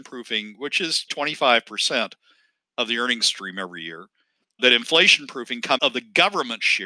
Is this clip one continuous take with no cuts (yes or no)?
no